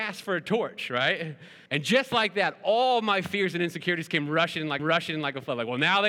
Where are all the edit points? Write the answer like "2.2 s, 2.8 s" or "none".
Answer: 1.7 s, 4.8 s